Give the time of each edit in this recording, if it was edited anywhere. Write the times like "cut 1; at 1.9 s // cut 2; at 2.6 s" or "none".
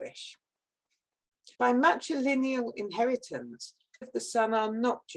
cut 1; at 1.5 s // cut 2; at 4.0 s